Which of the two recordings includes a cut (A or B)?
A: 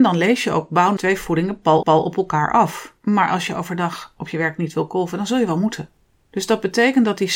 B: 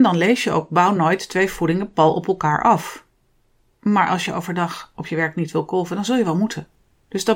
A